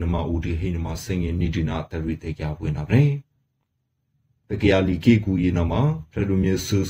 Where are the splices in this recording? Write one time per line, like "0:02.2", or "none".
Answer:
none